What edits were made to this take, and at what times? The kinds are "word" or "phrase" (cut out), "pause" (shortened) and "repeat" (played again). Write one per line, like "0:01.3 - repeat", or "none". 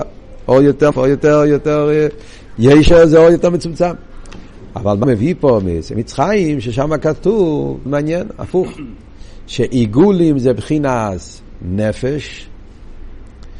0:00.9 - word
0:05.0 - word
0:07.9 - word